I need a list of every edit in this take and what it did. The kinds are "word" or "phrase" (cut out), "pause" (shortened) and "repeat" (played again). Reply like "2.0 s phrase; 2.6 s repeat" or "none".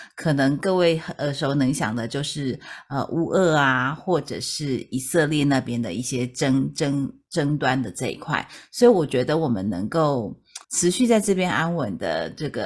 10.6 s pause

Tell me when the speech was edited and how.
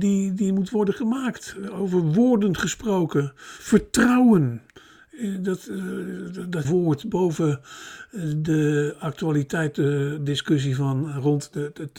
6.6 s phrase

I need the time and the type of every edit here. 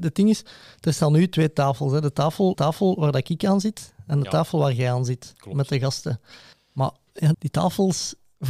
2.5 s repeat; 6.5 s pause; 7.3 s word

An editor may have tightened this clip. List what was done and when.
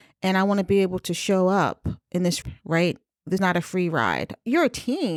2.4 s word; 3.4 s word

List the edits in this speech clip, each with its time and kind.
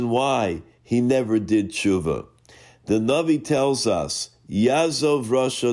none

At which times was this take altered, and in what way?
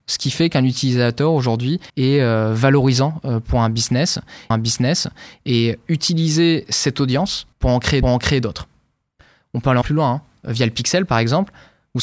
1.9 s pause; 4.5 s repeat; 7.5 s pause; 8.0 s repeat; 9.8 s word

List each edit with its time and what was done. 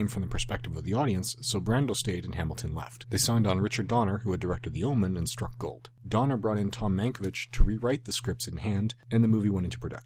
none

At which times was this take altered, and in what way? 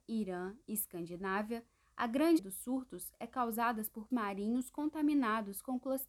2.4 s word; 4.1 s word

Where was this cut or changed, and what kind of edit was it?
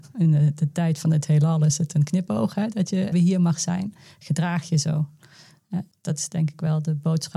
3.1 s word

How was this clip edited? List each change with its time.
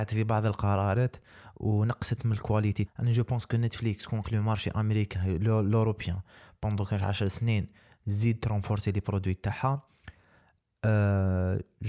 2.9 s word; 4.2 s word

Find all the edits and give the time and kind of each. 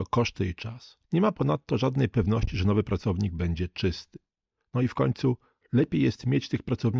1.0 s pause

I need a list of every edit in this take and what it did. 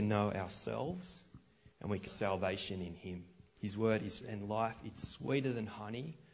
1.7 s pause; 2.1 s word; 3.5 s pause; 4.2 s word

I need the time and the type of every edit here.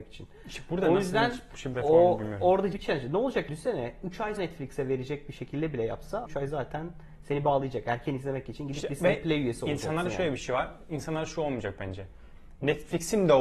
1.7 s word; 2.7 s word; 3.5 s word; 4.4 s word; 6.3 s word

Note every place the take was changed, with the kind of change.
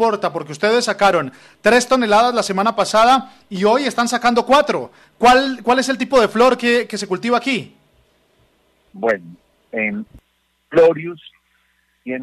none

